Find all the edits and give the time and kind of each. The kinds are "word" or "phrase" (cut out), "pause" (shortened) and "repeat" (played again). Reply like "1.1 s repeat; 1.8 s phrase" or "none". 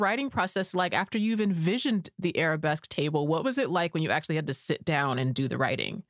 none